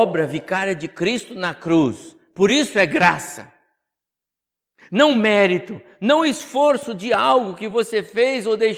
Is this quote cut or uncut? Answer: uncut